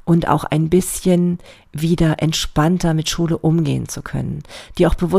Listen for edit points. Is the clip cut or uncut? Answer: uncut